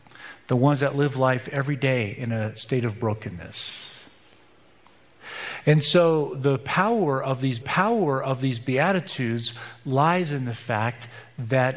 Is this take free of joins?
no; 1 cut; at 7.6 s

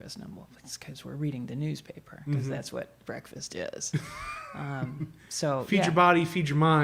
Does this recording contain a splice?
no; 0 cuts

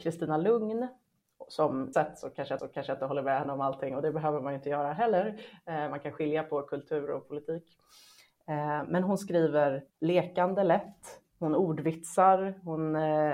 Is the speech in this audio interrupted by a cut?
yes; 3 cuts; at 1.9 s, 2.6 s, 9.9 s

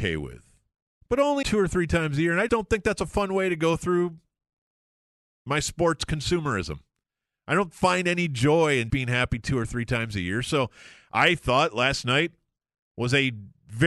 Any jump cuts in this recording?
yes; 3 cuts; at 1.4 s, 2.5 s, 8.9 s

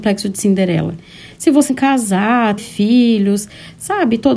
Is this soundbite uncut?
no; 2 cuts; at 1.7 s, 2.6 s

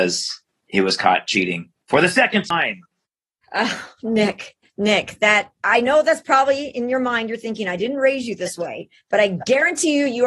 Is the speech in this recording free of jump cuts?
no; 3 cuts; at 1.8 s, 4.6 s, 5.5 s

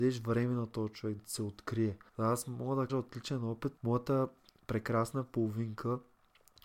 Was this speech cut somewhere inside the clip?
yes; 4 cuts; at 1.2 s, 2.1 s, 2.9 s, 3.8 s

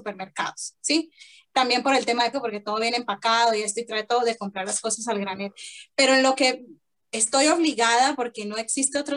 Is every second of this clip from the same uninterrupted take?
no; 1 cut; at 2.3 s

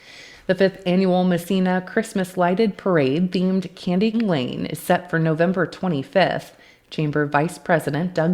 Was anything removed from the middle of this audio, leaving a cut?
yes; 1 cut; at 4.1 s

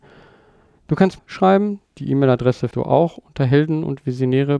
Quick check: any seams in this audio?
yes; 3 cuts; at 1.2 s, 1.9 s, 2.7 s

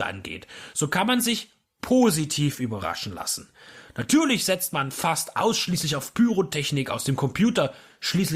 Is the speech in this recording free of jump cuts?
yes; 0 cuts

